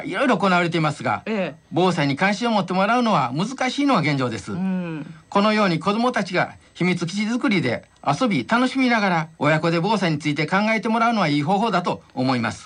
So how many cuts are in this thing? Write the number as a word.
one